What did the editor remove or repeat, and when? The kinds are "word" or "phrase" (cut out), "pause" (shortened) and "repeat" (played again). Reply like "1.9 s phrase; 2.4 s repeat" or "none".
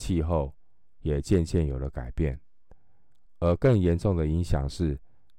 none